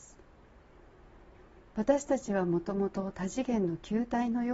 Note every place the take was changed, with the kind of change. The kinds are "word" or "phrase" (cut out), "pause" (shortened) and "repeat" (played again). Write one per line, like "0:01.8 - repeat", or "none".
0:01.7 - pause